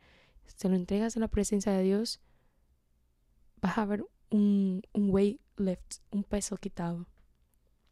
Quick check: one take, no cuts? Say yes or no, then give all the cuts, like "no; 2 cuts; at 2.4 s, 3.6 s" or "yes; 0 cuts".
no; 1 cut; at 6.1 s